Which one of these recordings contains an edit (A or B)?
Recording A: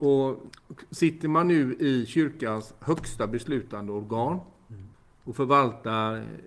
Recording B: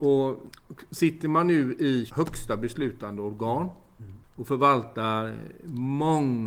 B